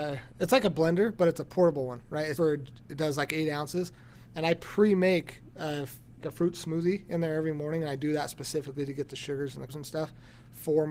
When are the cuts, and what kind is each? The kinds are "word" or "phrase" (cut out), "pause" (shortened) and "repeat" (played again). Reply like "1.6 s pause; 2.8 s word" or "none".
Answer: 2.4 s word; 6.2 s word; 9.7 s word